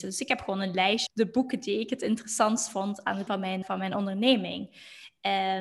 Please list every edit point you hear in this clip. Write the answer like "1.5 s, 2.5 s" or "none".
1.1 s, 3.3 s, 3.6 s